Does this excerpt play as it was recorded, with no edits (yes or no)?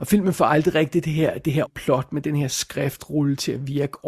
no